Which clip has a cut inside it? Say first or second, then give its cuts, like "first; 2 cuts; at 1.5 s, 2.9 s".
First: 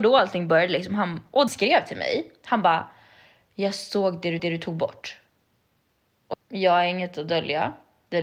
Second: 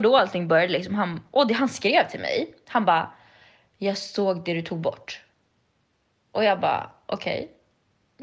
first; 3 cuts; at 1.5 s, 4.4 s, 6.3 s